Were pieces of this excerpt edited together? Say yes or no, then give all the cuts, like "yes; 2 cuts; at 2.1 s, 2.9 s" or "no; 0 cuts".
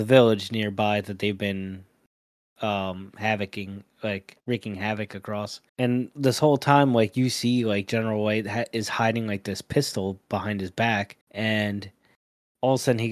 yes; 3 cuts; at 4.4 s, 5.7 s, 11.2 s